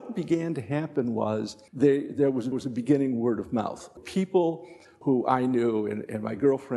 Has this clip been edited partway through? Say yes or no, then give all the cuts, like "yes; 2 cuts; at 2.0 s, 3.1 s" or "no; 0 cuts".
yes; 4 cuts; at 1.7 s, 2.5 s, 4.0 s, 5.0 s